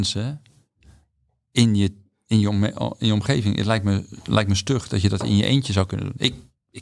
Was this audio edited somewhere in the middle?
no; 0 cuts

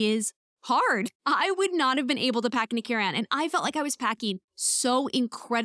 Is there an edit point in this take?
yes; 2 cuts; at 1.2 s, 4.4 s

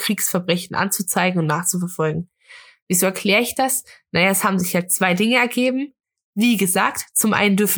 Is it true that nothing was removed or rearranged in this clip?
yes; 0 cuts

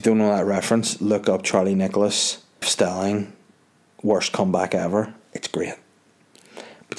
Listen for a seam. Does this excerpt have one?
yes; 1 cut; at 2.6 s

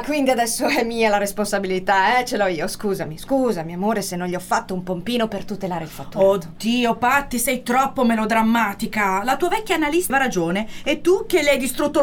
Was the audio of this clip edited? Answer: yes; 1 cut; at 10.1 s

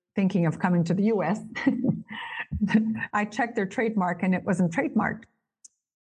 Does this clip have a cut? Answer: yes; 1 cut; at 3.1 s

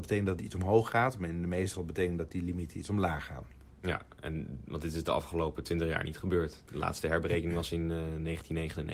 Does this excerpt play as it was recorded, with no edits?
no; 1 cut; at 1.7 s

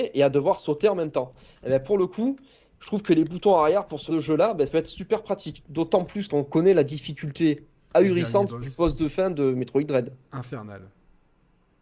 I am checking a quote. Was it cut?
yes; 3 cuts; at 4.1 s, 4.7 s, 6.3 s

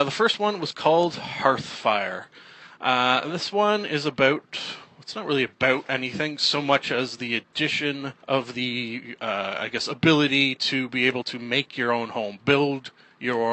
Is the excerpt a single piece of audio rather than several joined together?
no; 1 cut; at 8.2 s

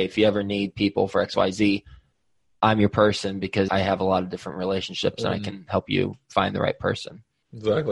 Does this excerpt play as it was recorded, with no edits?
yes; 0 cuts

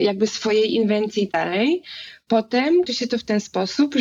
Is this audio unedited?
no; 2 cuts; at 1.3 s, 2.9 s

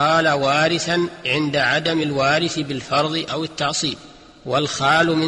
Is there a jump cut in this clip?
no; 0 cuts

